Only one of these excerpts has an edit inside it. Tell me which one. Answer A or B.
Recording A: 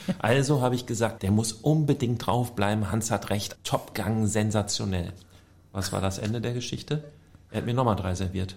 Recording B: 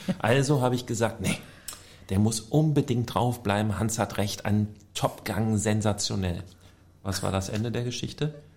A